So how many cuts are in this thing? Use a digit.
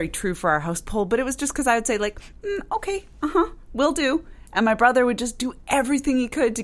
0